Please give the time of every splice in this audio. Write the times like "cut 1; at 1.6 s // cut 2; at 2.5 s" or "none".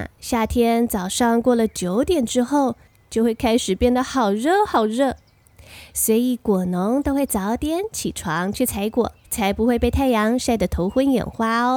cut 1; at 9.2 s